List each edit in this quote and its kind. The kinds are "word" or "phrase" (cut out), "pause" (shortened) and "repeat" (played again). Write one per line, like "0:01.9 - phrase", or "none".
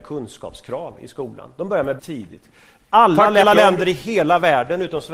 0:02.0 - word
0:03.4 - word